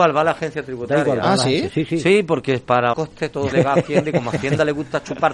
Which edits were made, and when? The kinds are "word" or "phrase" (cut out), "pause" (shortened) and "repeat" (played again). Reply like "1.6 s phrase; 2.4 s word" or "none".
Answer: 2.9 s word; 3.5 s word